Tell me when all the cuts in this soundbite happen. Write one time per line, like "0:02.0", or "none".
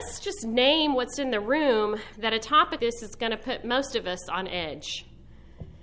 0:02.1
0:02.8